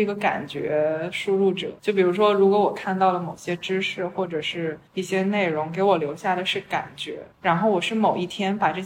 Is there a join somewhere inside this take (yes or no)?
yes